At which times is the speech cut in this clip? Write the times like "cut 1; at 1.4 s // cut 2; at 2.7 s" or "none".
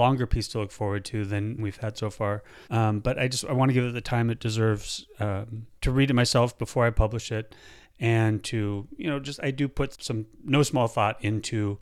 cut 1; at 1.6 s // cut 2; at 2.6 s // cut 3; at 5.8 s // cut 4; at 9.9 s